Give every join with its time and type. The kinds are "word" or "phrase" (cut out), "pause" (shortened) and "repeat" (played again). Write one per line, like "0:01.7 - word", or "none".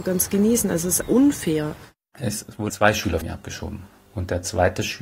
0:01.0 - word
0:02.7 - word
0:03.2 - word